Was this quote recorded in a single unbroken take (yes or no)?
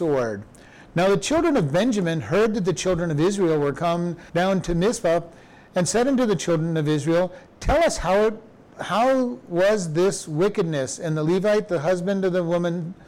no